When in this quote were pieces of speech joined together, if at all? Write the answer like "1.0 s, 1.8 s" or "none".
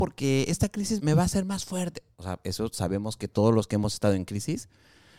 1.0 s